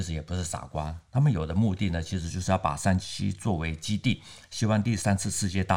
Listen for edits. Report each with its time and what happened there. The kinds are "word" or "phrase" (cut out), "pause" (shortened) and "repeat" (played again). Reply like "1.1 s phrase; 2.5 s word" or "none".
none